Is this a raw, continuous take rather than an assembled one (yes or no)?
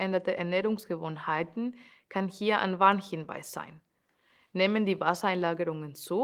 yes